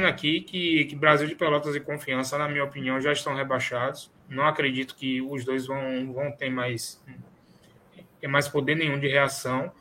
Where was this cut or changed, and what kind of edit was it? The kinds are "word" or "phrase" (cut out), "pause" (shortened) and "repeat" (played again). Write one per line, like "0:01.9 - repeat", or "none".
0:04.2 - pause